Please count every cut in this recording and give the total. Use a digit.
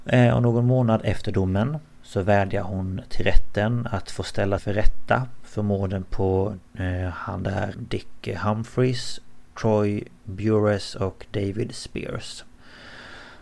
4